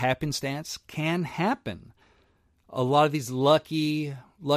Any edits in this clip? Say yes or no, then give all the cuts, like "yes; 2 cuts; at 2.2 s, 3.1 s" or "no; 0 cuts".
no; 0 cuts